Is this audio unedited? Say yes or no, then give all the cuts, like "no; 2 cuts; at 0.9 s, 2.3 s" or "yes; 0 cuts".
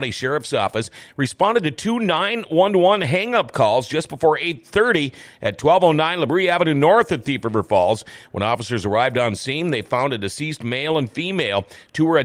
yes; 0 cuts